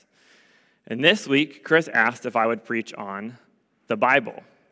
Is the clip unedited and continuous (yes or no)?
yes